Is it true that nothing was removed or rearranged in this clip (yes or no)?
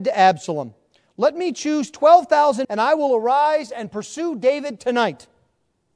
no